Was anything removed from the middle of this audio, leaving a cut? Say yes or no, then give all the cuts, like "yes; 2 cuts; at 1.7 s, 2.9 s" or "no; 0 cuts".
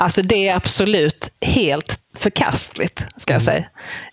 yes; 1 cut; at 2.0 s